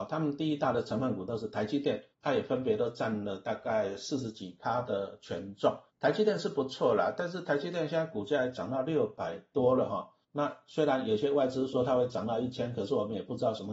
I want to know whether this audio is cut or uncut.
cut